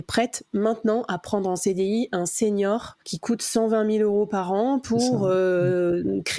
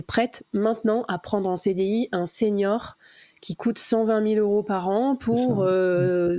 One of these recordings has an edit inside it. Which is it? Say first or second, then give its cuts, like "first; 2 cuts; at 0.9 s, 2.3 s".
first; 1 cut; at 3.0 s